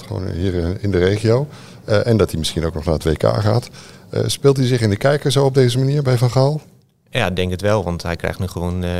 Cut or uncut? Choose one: uncut